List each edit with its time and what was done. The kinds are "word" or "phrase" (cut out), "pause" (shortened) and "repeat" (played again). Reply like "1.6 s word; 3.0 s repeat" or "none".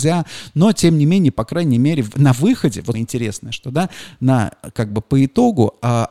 2.9 s word